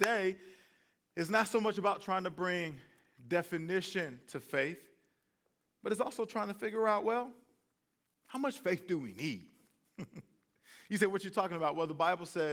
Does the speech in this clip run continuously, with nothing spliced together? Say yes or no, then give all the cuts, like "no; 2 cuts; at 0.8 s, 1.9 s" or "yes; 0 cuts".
yes; 0 cuts